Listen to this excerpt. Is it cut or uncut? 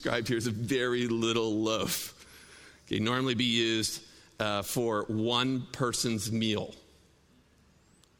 uncut